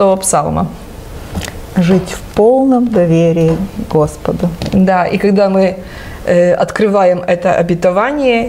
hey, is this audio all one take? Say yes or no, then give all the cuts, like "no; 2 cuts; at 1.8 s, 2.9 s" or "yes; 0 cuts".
yes; 0 cuts